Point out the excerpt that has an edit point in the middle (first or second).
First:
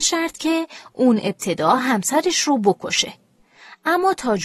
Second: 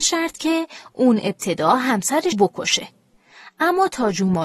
second